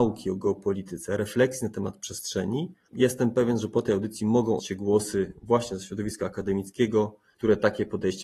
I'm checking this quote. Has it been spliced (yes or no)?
yes